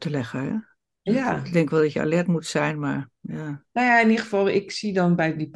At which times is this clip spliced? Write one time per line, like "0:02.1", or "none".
0:03.7